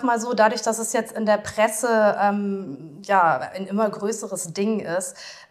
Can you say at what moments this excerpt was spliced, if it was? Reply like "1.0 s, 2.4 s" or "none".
none